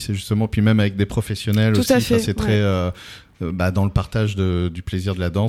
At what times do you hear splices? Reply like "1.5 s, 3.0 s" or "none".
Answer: none